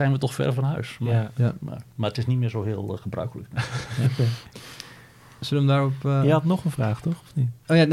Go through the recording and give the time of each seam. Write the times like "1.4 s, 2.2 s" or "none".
1.9 s